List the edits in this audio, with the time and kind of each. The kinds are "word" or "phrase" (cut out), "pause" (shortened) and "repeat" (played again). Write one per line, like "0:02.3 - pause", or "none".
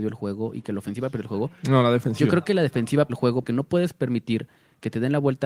0:03.1 - word
0:03.4 - word